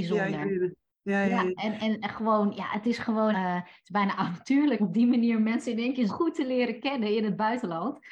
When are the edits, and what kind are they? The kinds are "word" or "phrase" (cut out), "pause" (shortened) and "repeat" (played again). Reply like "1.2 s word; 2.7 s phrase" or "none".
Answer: 1.6 s word; 3.3 s word; 4.8 s word; 6.1 s word